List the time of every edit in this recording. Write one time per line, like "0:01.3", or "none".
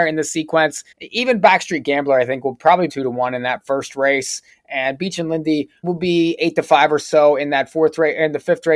0:00.9
0:02.9
0:05.8

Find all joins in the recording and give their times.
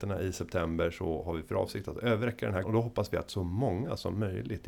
0:02.6

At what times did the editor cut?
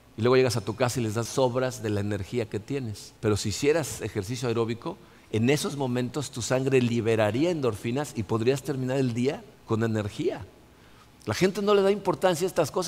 0:01.3
0:03.2
0:09.5

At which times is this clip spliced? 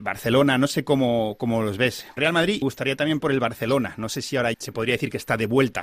0:02.2
0:02.6
0:03.2
0:04.5

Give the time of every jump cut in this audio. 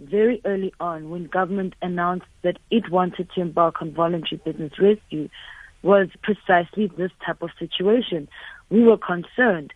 0:06.1

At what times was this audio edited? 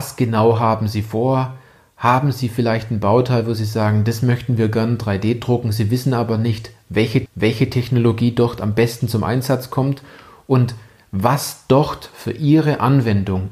0:07.3

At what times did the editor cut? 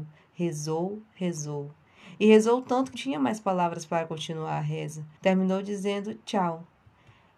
0:02.9
0:05.2

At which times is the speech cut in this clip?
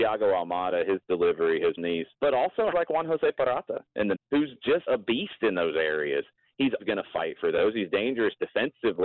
0:01.8
0:02.1
0:02.7
0:04.1
0:04.9
0:06.8

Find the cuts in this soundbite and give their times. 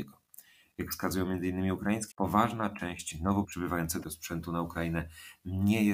0:02.1
0:03.4
0:04.0

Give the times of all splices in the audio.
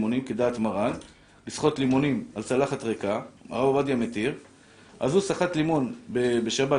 none

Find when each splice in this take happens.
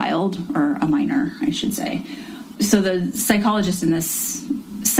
0:02.5

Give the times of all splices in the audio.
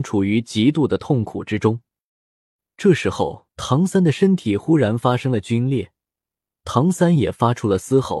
0:03.5

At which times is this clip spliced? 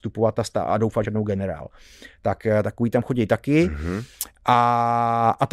0:01.0

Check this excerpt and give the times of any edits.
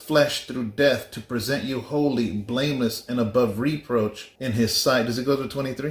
0:04.4

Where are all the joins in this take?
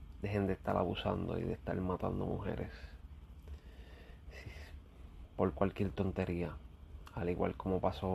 none

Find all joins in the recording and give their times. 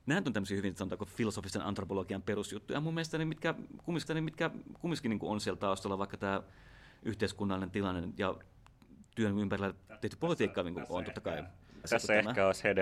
0:04.1
0:09.1
0:11.8

